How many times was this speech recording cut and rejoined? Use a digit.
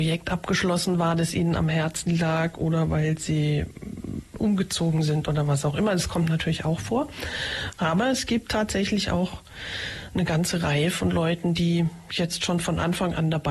0